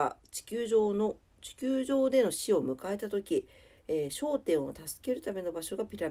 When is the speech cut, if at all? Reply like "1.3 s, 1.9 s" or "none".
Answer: none

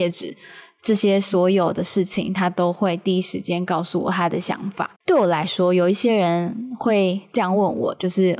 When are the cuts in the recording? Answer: 5.0 s

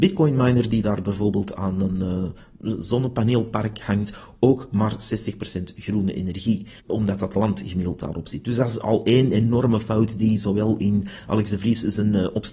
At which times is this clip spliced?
6.8 s

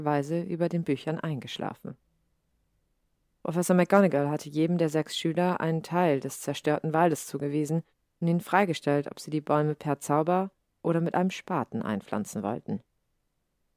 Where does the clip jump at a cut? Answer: none

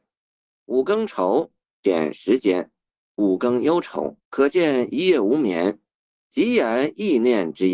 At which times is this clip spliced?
4.2 s

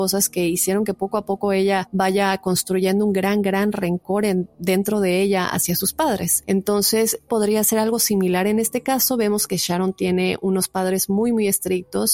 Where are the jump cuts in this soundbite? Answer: 7.3 s

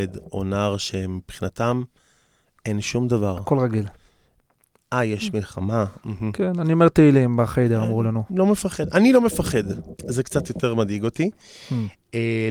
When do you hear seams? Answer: none

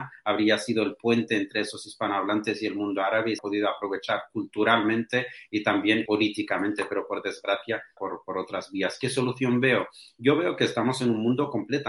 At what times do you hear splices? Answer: 3.4 s, 6.1 s, 8.0 s

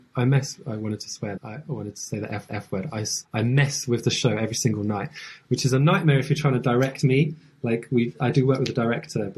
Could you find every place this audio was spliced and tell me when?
1.4 s, 2.5 s, 3.2 s

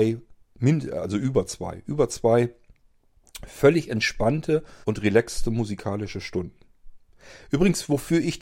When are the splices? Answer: 4.8 s

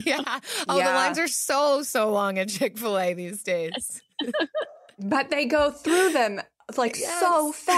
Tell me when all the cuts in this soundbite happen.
none

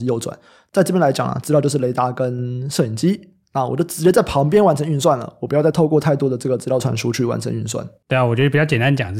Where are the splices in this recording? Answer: none

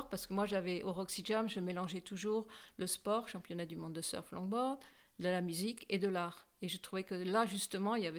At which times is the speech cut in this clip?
none

